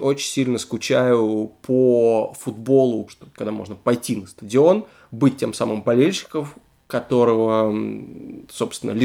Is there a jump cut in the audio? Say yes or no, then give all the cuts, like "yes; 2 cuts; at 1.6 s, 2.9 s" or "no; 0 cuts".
yes; 1 cut; at 3.1 s